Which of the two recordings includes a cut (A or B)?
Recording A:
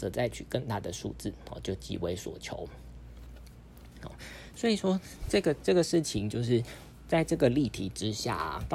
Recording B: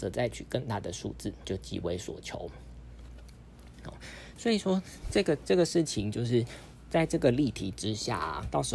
B